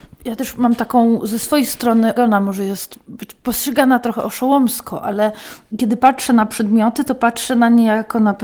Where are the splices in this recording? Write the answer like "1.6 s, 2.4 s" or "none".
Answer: 2.2 s